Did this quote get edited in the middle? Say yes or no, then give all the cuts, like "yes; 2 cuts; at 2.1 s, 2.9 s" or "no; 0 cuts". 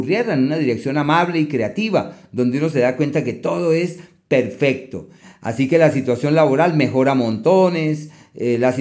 no; 0 cuts